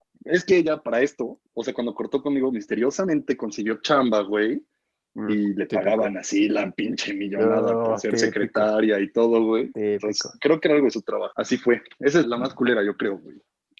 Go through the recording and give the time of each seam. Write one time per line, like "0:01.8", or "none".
0:01.5
0:12.2